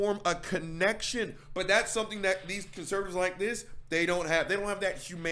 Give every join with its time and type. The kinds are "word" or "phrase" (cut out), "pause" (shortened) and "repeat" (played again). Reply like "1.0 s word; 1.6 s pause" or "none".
none